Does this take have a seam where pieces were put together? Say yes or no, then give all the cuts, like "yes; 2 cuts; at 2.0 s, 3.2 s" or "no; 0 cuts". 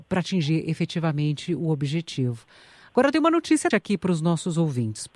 yes; 1 cut; at 3.7 s